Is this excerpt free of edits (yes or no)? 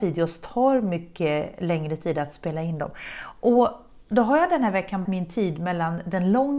no